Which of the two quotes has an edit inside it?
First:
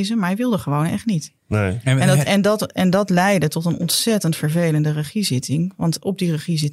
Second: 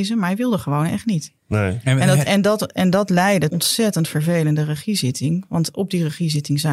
second; 1 cut; at 3.5 s

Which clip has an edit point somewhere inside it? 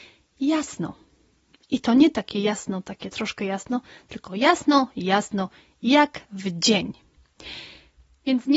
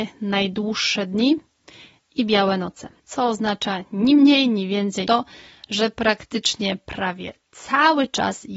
second; 2 cuts; at 3.0 s, 5.0 s

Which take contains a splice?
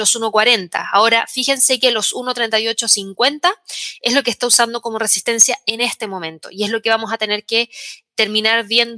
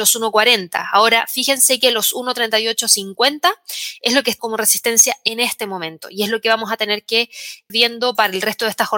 second; 2 cuts; at 4.4 s, 7.7 s

